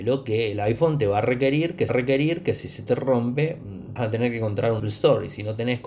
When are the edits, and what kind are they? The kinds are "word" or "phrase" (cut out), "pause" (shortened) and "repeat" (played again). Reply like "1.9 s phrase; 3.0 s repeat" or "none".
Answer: 1.9 s repeat; 4.0 s word; 4.8 s word